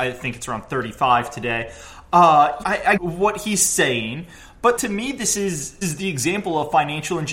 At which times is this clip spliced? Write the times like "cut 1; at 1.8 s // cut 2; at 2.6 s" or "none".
cut 1; at 2.6 s // cut 2; at 3.0 s // cut 3; at 4.8 s // cut 4; at 5.8 s

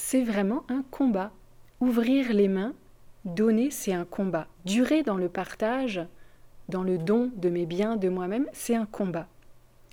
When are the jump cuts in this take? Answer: cut 1; at 4.5 s

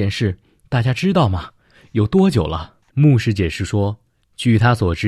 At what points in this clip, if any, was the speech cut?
cut 1; at 2.8 s

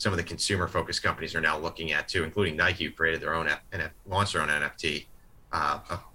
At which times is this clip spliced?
none

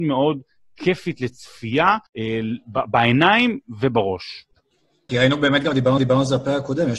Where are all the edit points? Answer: cut 1; at 2.1 s // cut 2; at 5.1 s // cut 3; at 6.0 s

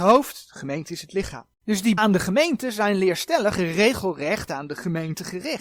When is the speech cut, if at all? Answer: cut 1; at 1.5 s // cut 2; at 2.0 s

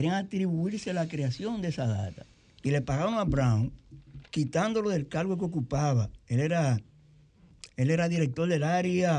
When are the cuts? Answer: cut 1; at 2.3 s // cut 2; at 4.3 s

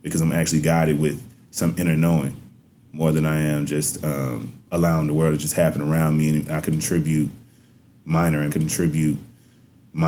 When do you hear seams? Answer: cut 1; at 4.6 s // cut 2; at 8.5 s

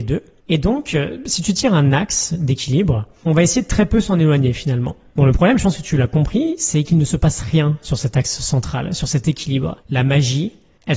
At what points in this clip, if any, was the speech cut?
cut 1; at 9.8 s

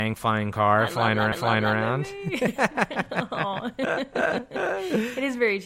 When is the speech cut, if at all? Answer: cut 1; at 1.3 s

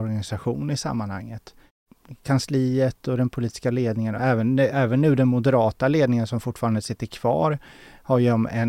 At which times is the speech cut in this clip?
none

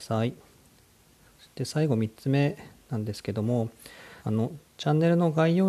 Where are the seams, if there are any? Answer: cut 1; at 4.2 s

